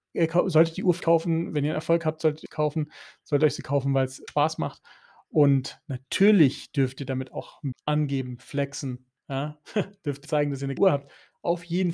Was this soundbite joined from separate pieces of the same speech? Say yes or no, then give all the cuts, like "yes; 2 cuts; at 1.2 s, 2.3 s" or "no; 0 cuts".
yes; 6 cuts; at 1.0 s, 2.4 s, 4.3 s, 7.7 s, 10.2 s, 10.8 s